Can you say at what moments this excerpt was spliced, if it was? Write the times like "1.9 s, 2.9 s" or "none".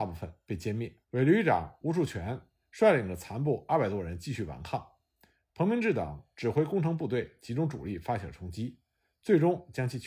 1.0 s